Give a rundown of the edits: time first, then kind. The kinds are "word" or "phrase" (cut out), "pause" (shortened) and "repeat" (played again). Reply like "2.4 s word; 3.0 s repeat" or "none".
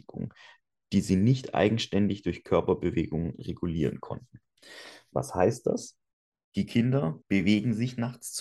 6.1 s pause; 7.2 s pause